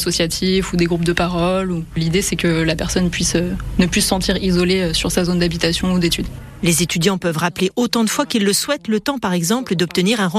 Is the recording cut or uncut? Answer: uncut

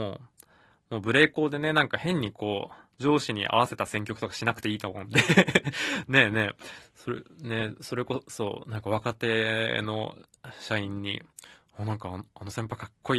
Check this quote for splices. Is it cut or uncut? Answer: cut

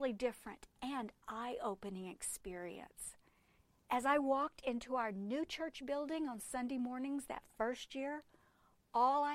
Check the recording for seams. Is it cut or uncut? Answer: uncut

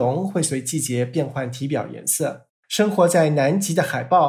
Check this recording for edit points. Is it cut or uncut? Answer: cut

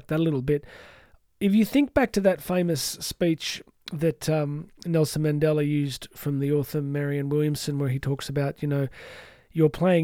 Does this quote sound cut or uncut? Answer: uncut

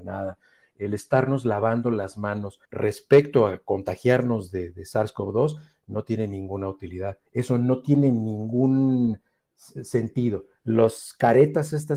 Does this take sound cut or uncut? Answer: cut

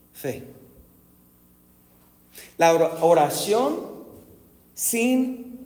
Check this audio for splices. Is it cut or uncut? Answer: uncut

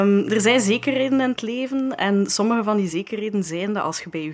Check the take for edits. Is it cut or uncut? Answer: uncut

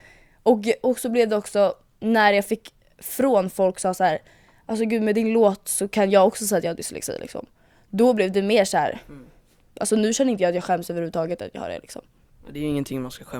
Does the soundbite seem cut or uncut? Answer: uncut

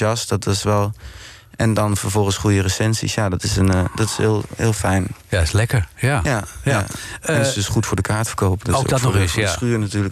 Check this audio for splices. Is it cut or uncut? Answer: uncut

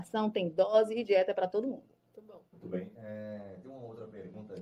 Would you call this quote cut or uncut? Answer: cut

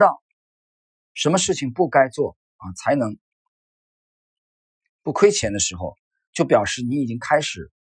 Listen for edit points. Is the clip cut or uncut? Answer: uncut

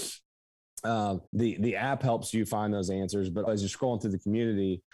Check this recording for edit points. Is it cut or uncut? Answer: cut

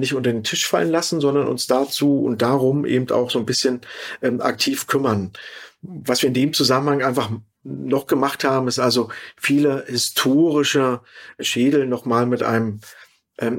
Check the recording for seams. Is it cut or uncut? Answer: uncut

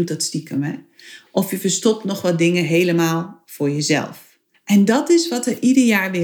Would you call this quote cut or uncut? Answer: cut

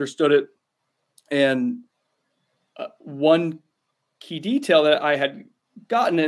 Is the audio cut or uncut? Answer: uncut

